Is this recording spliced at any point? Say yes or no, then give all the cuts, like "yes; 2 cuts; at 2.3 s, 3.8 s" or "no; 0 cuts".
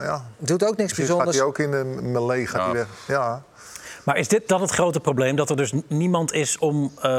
yes; 1 cut; at 4.5 s